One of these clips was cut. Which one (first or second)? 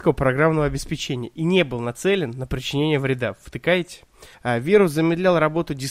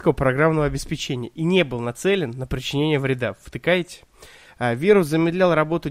first